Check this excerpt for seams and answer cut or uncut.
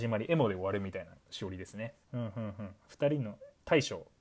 cut